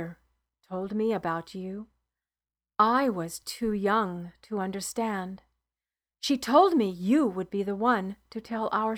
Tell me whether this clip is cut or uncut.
uncut